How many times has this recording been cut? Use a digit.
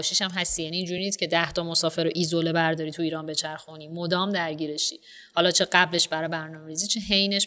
0